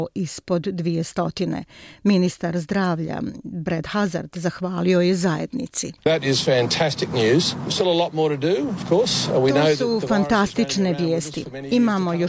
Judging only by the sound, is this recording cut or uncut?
cut